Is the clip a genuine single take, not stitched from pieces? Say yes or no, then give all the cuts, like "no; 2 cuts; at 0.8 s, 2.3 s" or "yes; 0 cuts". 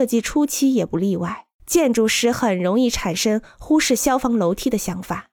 no; 1 cut; at 1.5 s